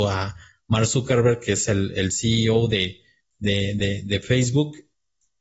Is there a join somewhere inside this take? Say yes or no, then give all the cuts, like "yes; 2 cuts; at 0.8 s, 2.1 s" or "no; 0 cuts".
no; 0 cuts